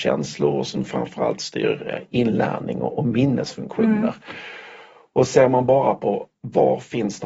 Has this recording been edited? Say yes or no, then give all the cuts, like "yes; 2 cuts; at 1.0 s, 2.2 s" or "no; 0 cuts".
no; 0 cuts